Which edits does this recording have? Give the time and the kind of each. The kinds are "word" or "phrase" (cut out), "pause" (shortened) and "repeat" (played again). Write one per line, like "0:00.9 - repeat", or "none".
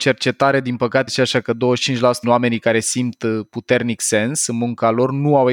0:01.1 - word
0:02.2 - word

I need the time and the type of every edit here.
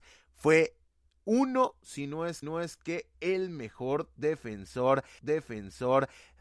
0:02.4 - repeat
0:05.2 - repeat

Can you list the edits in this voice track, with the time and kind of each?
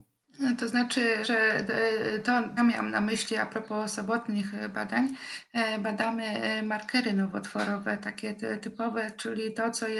0:01.2 - word
0:02.6 - phrase

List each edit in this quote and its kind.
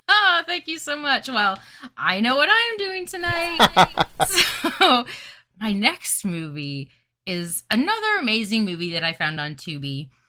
none

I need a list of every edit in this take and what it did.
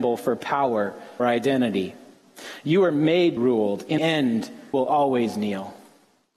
0:01.2 - word
0:03.4 - phrase
0:04.0 - word
0:04.7 - word

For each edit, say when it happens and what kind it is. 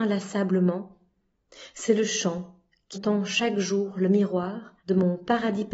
0:02.9 - word
0:04.8 - pause

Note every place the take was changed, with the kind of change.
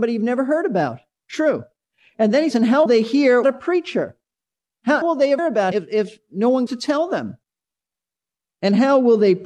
0:02.5 - word
0:02.9 - word
0:03.4 - word
0:05.0 - word
0:05.4 - word
0:05.7 - word
0:06.7 - word

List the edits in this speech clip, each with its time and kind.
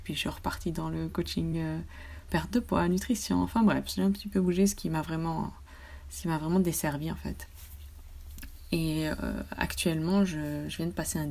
none

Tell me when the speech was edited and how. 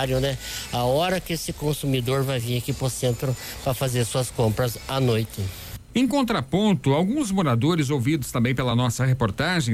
none

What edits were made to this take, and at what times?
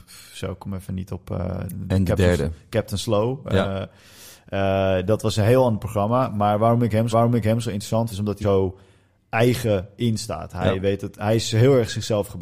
0:07.1 - repeat
0:08.1 - word
0:08.4 - word

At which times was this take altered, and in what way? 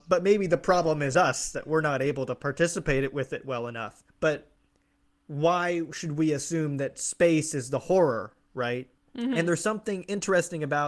0:04.1 - pause

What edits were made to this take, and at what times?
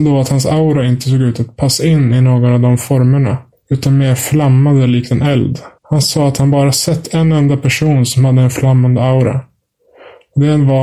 0:03.5 - pause
0:05.8 - pause

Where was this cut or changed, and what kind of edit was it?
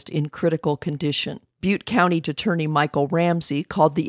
0:01.5 - pause
0:02.2 - word

